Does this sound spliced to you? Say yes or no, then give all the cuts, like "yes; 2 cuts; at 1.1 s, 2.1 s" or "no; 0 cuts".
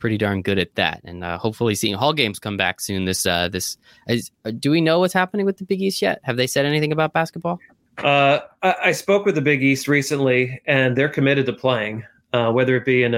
no; 0 cuts